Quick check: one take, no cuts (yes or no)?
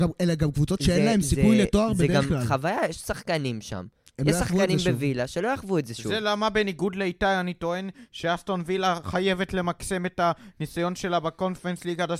yes